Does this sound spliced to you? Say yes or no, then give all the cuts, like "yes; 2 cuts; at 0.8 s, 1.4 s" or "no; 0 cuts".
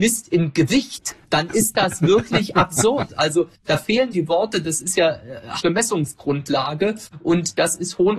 yes; 3 cuts; at 1.2 s, 4.1 s, 5.6 s